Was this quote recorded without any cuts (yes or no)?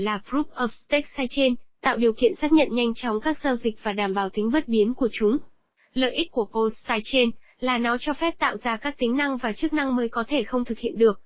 yes